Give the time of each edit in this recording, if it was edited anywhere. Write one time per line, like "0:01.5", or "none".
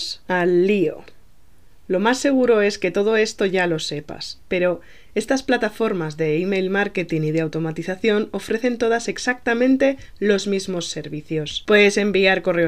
none